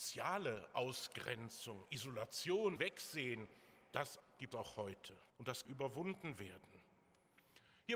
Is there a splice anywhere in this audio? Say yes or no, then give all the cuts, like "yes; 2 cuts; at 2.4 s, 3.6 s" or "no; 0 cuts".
yes; 5 cuts; at 2.8 s, 4.2 s, 4.5 s, 5.3 s, 5.6 s